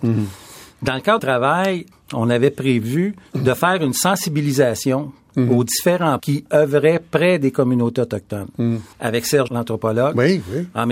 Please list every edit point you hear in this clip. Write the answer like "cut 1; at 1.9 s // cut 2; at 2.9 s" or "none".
cut 1; at 1.2 s // cut 2; at 1.9 s // cut 3; at 3.3 s // cut 4; at 6.2 s // cut 5; at 8.9 s // cut 6; at 9.5 s